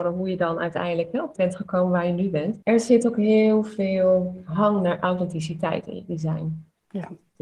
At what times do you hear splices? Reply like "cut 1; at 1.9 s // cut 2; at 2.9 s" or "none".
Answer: cut 1; at 1.4 s // cut 2; at 2.6 s